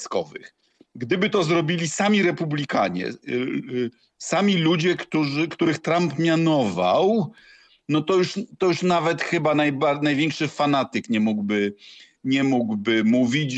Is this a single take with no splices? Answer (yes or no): yes